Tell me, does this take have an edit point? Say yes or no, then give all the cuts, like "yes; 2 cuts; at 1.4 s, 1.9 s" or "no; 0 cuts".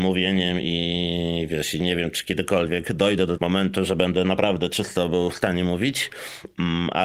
yes; 1 cut; at 3.4 s